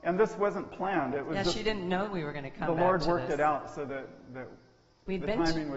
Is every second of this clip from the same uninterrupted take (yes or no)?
yes